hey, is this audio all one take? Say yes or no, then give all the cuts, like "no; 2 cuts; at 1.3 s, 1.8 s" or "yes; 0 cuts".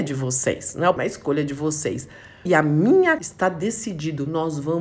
no; 3 cuts; at 1.0 s, 2.5 s, 3.2 s